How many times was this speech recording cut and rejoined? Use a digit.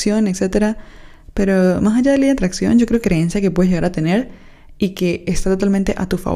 1